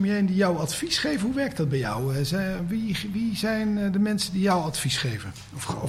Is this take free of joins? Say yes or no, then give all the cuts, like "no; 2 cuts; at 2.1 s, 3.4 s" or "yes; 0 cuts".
yes; 0 cuts